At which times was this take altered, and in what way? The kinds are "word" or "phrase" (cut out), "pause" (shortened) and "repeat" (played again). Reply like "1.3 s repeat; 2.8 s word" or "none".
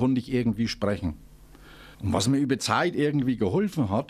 1.9 s pause; 2.6 s word